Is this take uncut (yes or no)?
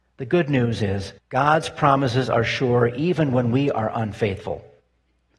no